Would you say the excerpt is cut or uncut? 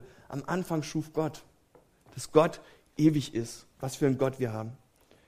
cut